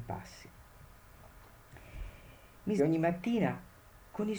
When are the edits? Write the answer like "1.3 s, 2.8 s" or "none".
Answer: 2.8 s